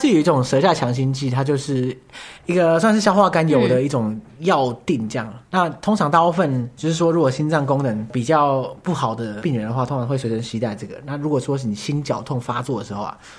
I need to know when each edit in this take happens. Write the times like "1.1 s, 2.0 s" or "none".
2.4 s, 4.3 s